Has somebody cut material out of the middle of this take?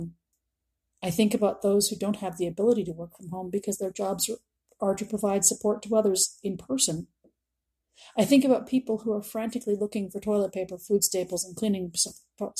no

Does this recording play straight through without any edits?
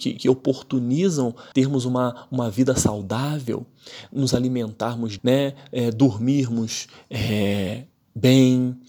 no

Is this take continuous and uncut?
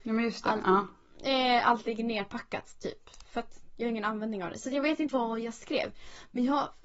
no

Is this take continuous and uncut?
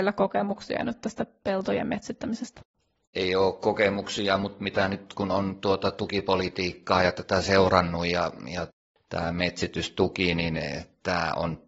yes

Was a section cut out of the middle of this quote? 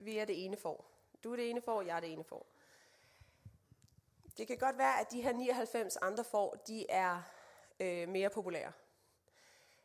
no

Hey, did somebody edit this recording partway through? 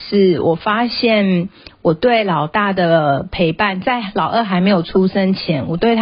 no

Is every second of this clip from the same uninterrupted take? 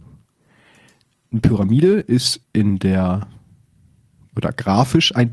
no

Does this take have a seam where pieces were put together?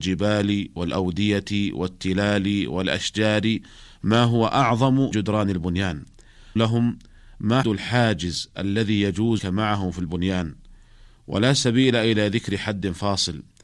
yes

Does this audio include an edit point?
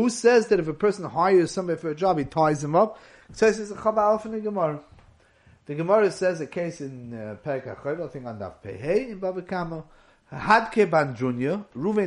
no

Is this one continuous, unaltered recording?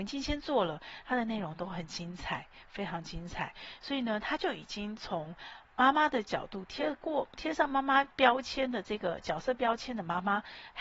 no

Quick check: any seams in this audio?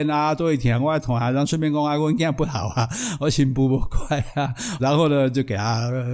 yes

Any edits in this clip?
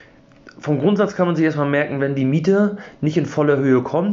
no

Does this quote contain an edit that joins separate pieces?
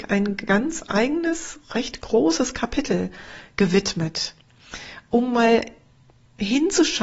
no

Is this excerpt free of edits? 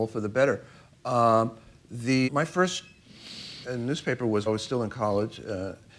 no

